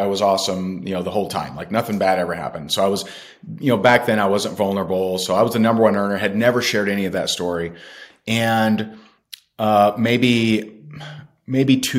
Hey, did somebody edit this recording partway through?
no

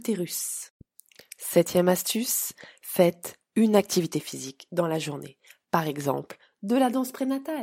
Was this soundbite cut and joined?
no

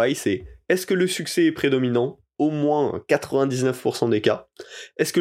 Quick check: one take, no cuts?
yes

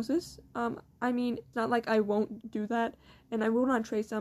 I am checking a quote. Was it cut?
yes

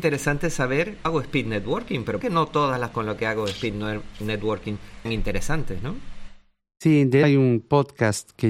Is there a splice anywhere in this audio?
yes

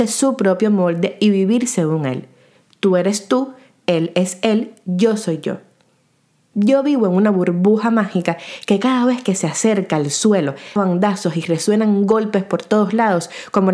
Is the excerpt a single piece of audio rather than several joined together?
no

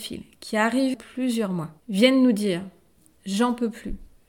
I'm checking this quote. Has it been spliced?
yes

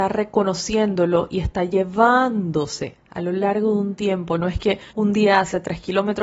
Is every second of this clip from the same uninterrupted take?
no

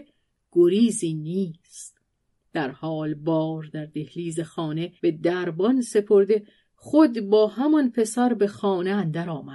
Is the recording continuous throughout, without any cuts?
no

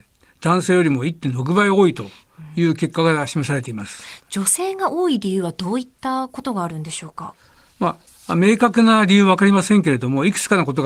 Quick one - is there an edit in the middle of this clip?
no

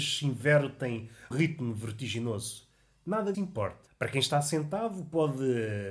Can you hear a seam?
yes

